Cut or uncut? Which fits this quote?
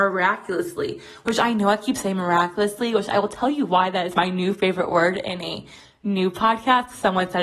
uncut